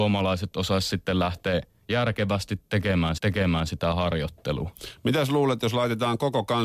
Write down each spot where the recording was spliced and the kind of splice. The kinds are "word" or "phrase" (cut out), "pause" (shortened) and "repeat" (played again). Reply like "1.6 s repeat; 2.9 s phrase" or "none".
3.2 s repeat